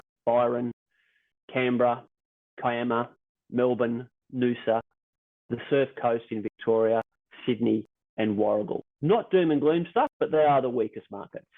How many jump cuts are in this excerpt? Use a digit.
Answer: 0